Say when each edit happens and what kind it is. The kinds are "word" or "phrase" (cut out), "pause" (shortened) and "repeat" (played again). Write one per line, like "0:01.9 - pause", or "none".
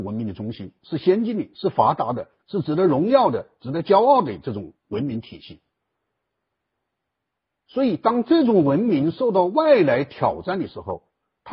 0:02.4 - pause

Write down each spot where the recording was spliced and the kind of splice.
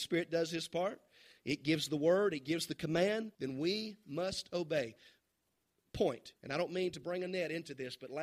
0:03.3 - pause
0:06.4 - pause

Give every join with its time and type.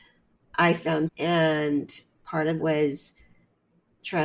0:01.1 - word
0:02.6 - word

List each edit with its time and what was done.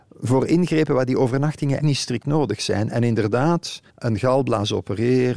0:01.8 - word
0:03.9 - pause

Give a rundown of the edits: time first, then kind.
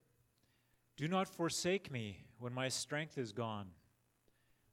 none

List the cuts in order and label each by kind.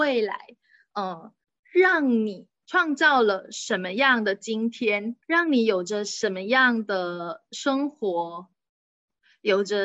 0:01.4 - pause
0:05.2 - pause

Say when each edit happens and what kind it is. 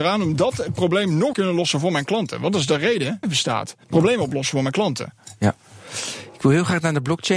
0:01.3 - phrase
0:03.2 - phrase
0:03.8 - pause

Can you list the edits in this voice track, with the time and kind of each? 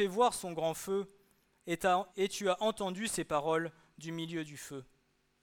0:02.1 - pause

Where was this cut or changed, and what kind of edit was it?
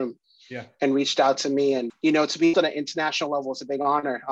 0:01.9 - word
0:02.5 - word

